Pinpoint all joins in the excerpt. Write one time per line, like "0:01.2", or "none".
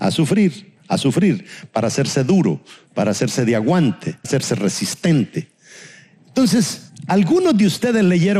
0:04.2